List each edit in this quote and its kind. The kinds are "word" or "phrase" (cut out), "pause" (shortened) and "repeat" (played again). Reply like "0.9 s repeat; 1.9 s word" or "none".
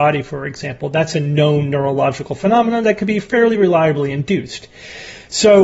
none